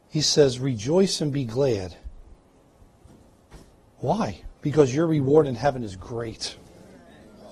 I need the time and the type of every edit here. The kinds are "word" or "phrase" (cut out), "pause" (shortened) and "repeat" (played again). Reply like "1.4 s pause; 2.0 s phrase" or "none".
4.6 s pause